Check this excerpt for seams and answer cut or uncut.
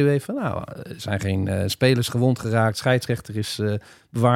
uncut